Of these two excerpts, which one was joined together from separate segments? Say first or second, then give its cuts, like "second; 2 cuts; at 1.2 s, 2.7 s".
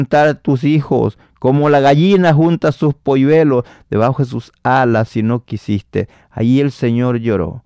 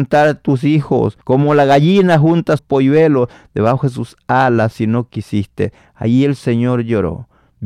second; 2 cuts; at 1.2 s, 2.6 s